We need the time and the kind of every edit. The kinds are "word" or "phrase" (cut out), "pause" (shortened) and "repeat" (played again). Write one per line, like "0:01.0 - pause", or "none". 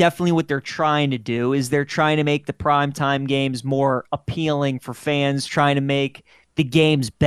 none